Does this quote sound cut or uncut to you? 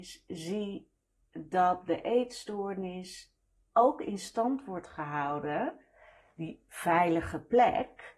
uncut